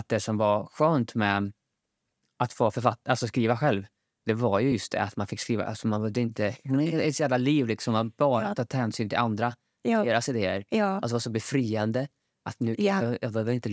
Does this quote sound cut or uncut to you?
uncut